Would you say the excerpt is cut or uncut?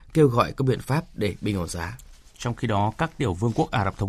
uncut